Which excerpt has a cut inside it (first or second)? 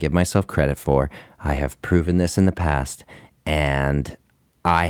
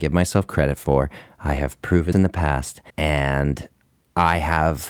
second